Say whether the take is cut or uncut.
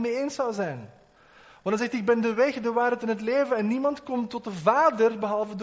uncut